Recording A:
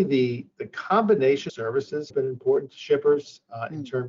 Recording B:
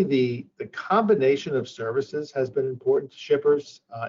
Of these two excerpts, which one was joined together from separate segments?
A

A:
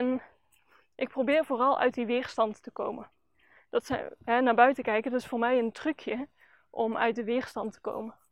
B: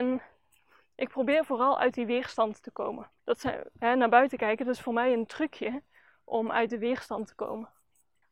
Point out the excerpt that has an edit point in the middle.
B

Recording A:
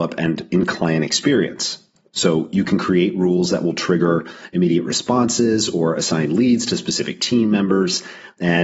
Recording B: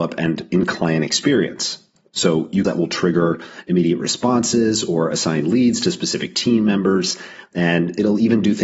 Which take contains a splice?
B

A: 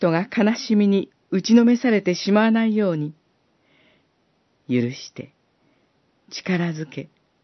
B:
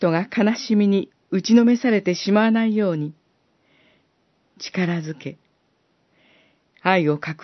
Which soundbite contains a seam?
B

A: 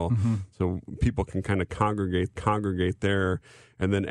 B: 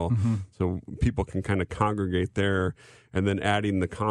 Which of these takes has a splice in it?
A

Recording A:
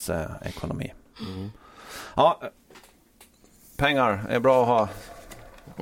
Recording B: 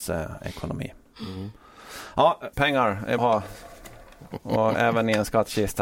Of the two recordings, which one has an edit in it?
B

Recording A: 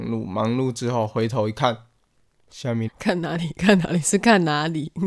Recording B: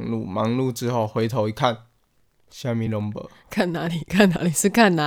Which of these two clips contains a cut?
A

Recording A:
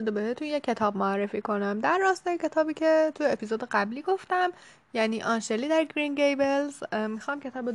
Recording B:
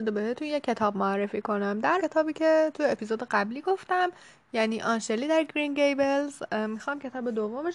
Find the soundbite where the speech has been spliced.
B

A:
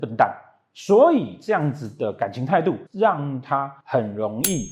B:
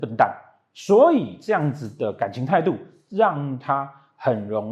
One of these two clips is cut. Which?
A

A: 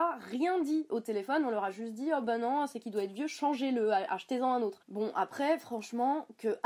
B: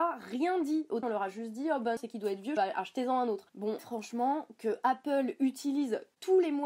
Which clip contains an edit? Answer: B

